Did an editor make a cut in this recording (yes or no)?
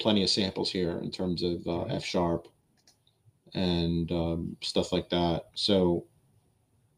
no